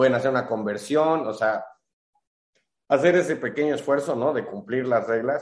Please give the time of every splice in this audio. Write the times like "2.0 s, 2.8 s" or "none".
none